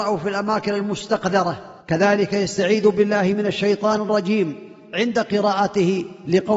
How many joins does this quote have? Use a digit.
1